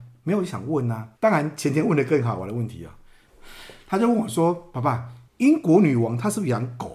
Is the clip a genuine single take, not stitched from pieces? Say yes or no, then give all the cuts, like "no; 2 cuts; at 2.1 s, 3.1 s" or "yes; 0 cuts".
no; 2 cuts; at 1.2 s, 5.3 s